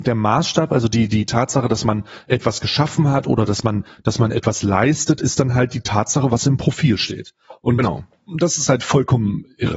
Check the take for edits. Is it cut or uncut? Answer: uncut